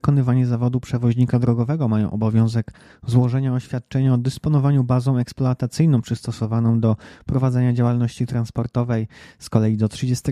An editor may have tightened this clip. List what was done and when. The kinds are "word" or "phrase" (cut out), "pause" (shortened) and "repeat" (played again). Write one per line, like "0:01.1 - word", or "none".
none